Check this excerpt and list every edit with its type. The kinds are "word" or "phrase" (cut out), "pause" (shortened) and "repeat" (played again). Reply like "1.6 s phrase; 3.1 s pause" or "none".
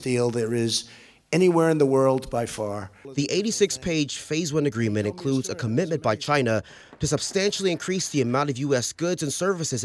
none